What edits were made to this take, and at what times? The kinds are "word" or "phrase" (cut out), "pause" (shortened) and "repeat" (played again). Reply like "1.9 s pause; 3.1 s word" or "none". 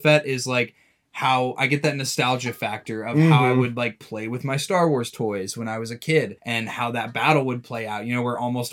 6.4 s pause